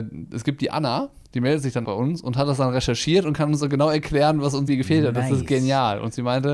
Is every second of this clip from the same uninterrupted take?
no; 2 cuts; at 1.8 s, 4.7 s

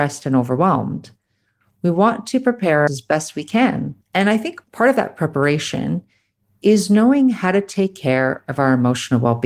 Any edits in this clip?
yes; 2 cuts; at 2.9 s, 4.0 s

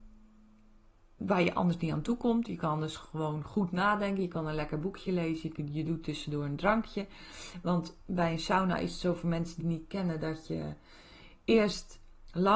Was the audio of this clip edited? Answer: yes; 1 cut; at 9.6 s

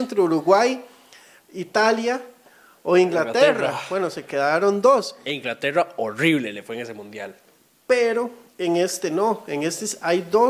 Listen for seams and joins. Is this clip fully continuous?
yes; 0 cuts

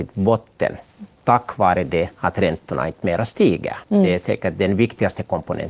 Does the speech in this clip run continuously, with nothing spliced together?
no; 1 cut; at 3.8 s

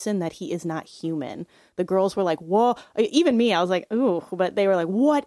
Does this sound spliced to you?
no; 0 cuts

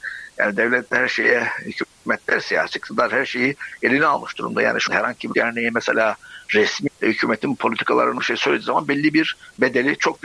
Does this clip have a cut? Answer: yes; 4 cuts; at 4.9 s, 5.3 s, 6.9 s, 8.2 s

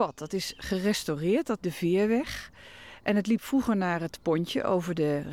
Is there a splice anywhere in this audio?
yes; 1 cut; at 1.6 s

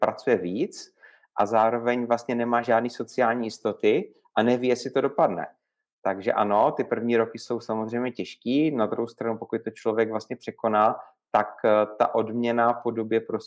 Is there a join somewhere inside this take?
no; 0 cuts

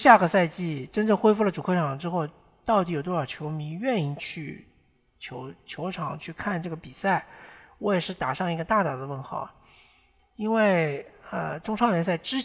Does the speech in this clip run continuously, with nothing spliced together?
yes; 0 cuts

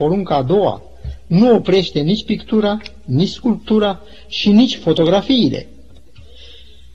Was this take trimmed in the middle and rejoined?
no; 0 cuts

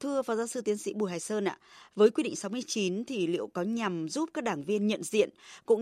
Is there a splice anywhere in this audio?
no; 0 cuts

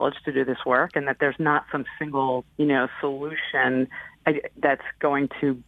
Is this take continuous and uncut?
no; 1 cut; at 2.5 s

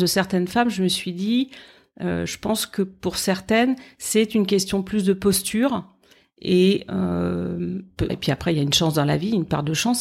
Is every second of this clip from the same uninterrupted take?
no; 1 cut; at 8.1 s

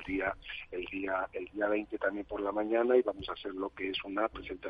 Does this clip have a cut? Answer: no; 0 cuts

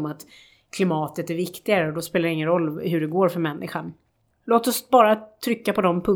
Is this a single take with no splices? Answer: yes; 0 cuts

